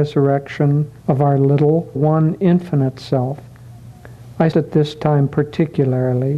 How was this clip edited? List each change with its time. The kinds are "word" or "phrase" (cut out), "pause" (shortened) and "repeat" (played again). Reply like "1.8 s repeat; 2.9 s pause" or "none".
1.0 s pause; 1.9 s phrase; 4.5 s word